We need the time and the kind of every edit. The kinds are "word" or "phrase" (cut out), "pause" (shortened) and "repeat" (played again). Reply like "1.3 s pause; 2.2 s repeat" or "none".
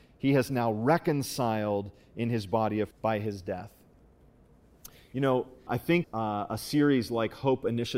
2.9 s word; 5.7 s word; 6.0 s word